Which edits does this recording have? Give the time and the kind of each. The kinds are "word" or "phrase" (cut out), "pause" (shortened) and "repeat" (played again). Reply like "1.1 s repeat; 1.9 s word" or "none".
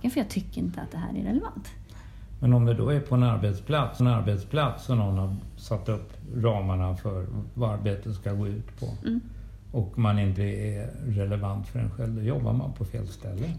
4.0 s repeat; 10.4 s word